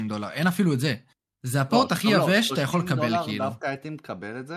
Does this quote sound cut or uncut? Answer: uncut